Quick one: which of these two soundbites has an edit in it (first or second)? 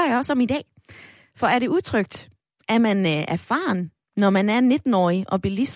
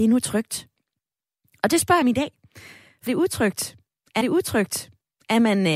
second